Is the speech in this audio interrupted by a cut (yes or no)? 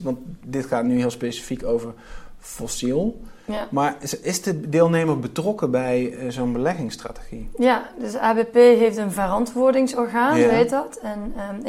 no